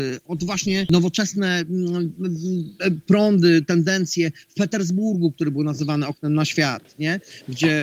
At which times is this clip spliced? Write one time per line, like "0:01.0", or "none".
none